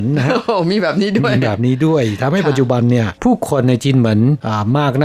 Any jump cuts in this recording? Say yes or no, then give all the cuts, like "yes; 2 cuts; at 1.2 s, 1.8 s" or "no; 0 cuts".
yes; 1 cut; at 3.2 s